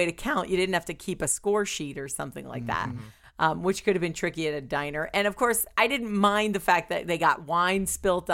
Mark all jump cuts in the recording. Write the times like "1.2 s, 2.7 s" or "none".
none